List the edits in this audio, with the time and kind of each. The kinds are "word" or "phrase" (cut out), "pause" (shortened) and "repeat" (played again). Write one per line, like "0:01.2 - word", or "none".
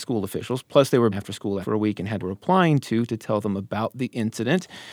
0:01.1 - phrase
0:01.6 - word
0:02.2 - phrase